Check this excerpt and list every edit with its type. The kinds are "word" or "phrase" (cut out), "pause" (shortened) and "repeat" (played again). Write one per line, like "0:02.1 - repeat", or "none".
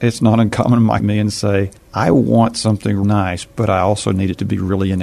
0:01.0 - phrase
0:01.8 - pause
0:03.0 - word